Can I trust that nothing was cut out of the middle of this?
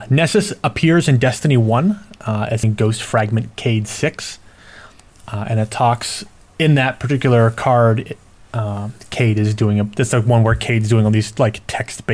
no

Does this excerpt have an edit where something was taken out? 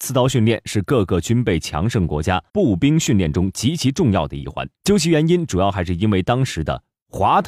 yes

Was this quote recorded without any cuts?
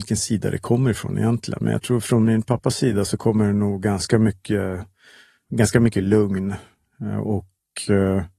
yes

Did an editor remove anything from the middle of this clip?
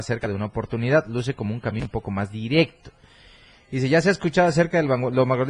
no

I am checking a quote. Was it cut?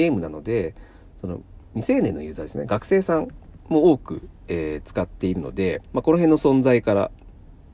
no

